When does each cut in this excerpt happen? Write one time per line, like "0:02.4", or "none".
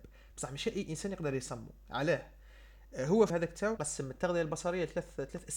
0:03.3
0:03.8